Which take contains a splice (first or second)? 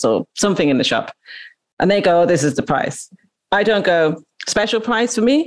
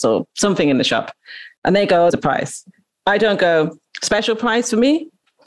second